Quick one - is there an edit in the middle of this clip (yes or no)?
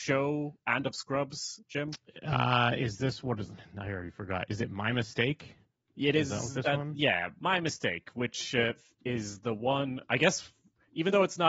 no